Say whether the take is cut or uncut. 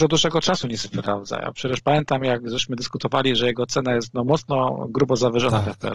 uncut